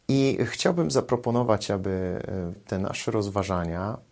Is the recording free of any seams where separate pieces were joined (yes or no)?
no